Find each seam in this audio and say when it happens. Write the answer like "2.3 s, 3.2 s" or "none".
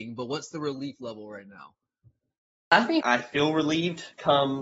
3.0 s